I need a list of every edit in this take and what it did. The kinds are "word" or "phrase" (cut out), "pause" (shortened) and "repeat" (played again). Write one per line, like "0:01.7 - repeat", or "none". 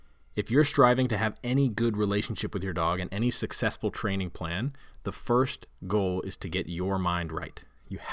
none